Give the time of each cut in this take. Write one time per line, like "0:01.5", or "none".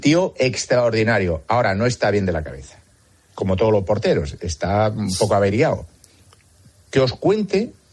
none